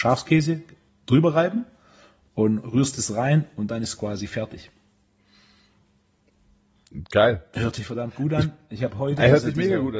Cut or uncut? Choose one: uncut